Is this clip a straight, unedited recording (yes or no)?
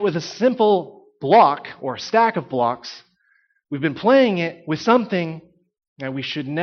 yes